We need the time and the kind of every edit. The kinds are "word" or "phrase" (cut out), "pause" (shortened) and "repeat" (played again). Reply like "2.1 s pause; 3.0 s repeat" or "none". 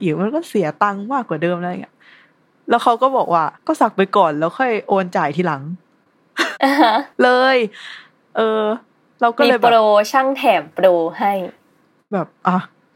3.6 s pause; 7.1 s pause